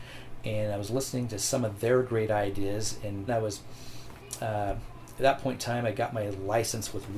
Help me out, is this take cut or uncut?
cut